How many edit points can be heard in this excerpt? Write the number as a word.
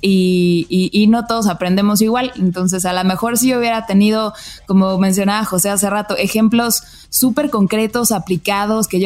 zero